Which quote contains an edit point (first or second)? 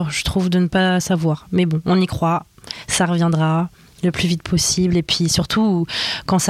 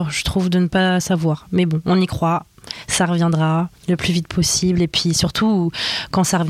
second